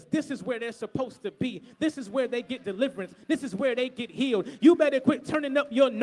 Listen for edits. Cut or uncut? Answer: uncut